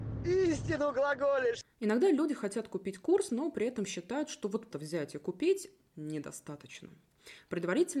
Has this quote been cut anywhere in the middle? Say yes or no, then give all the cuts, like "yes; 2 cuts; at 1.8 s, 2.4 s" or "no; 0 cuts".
yes; 1 cut; at 4.7 s